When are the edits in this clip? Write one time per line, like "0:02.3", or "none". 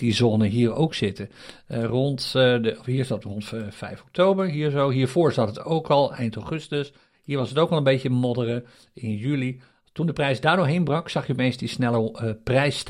none